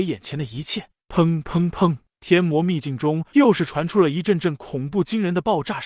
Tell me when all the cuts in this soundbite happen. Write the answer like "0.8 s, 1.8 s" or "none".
3.3 s